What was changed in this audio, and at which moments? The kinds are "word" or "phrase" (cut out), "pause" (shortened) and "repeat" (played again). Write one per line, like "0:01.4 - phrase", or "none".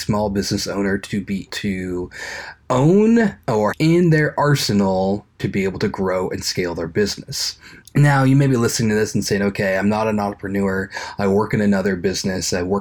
0:01.5 - word
0:03.7 - word
0:05.4 - phrase
0:07.8 - pause